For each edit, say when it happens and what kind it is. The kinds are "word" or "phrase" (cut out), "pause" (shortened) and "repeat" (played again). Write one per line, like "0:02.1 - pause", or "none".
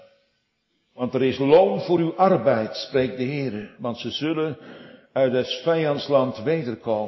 none